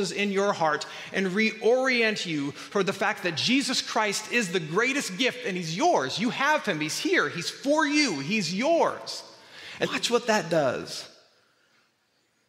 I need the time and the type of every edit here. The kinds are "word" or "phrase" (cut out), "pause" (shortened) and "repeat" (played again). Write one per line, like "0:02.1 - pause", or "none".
0:09.8 - word